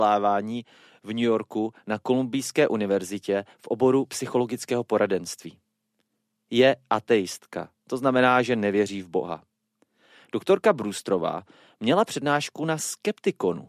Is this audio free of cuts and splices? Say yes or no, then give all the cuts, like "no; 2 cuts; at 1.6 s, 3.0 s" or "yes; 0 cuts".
yes; 0 cuts